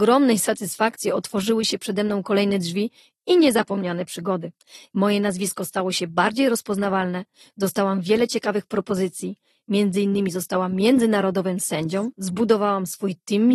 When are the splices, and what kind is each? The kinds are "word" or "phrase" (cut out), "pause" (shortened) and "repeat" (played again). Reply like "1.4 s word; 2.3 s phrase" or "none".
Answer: none